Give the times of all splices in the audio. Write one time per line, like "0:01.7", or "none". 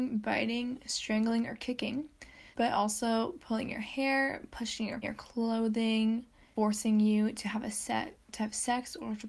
0:02.5
0:05.0
0:06.6